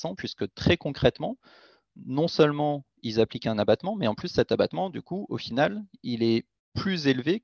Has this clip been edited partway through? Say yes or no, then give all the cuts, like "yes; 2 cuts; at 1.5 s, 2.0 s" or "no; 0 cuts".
no; 0 cuts